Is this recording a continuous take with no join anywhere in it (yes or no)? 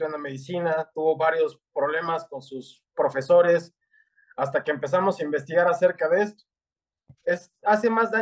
yes